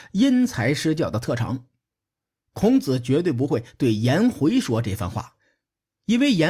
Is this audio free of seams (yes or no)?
yes